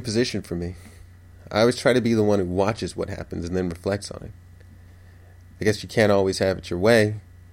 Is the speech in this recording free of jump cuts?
yes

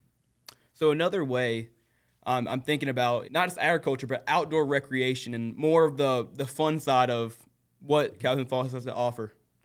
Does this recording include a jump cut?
yes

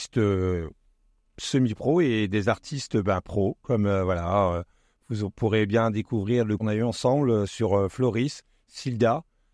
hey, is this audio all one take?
no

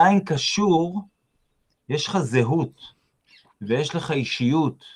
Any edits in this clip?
no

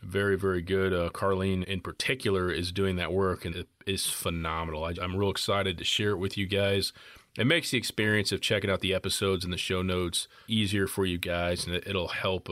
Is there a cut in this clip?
yes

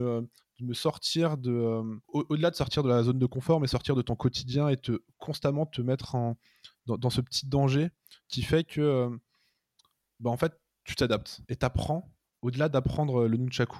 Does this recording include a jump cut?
yes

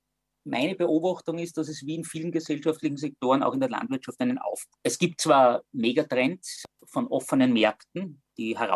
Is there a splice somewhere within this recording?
no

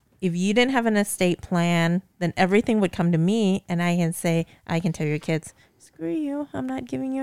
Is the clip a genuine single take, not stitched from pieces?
yes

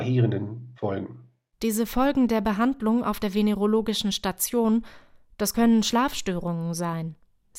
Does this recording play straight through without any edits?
yes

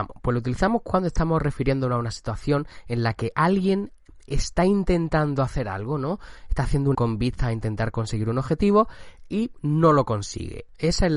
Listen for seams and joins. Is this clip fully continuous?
no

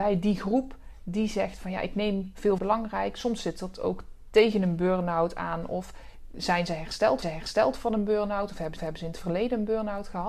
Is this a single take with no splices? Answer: no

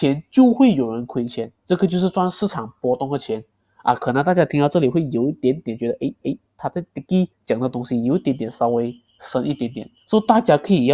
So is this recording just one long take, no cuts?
no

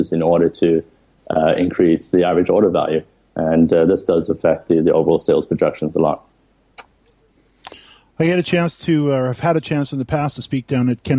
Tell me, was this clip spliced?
no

